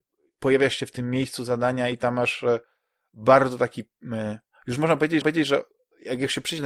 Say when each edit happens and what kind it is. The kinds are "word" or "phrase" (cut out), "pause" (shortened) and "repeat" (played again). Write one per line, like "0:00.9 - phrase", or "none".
0:05.2 - repeat